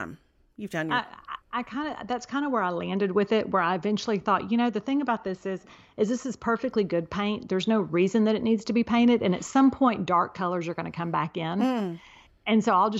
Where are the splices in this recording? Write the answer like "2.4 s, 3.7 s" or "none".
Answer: none